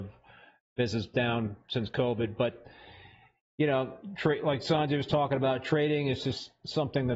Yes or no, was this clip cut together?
no